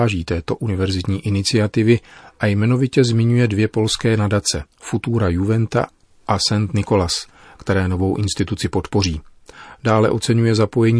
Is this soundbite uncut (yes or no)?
no